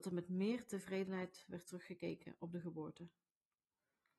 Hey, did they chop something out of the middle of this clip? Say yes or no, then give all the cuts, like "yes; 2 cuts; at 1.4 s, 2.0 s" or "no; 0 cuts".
no; 0 cuts